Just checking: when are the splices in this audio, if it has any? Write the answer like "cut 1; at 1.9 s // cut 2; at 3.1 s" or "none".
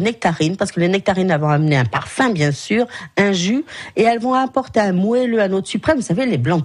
none